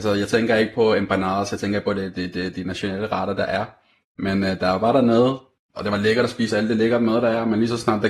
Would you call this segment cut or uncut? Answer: cut